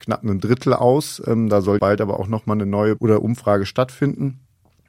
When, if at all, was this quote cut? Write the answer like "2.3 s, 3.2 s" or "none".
1.8 s, 3.0 s

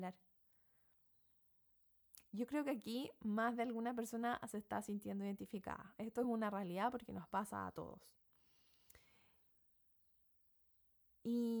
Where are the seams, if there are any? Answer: none

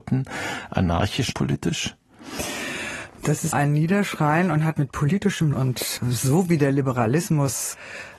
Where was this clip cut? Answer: 1.3 s, 3.5 s, 4.8 s, 5.5 s

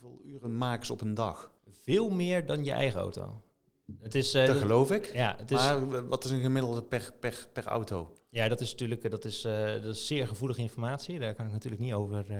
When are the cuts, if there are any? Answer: 1.6 s

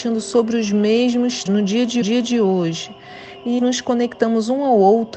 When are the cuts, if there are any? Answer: 1.5 s, 2.0 s, 3.6 s

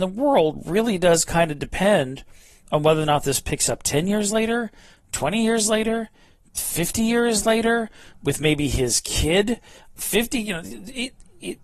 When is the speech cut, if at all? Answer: none

